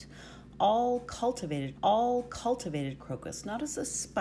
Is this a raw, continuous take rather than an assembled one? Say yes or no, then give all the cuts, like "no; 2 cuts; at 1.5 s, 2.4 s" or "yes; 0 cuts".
no; 1 cut; at 1.7 s